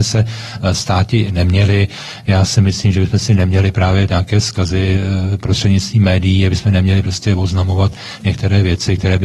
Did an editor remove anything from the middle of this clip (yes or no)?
yes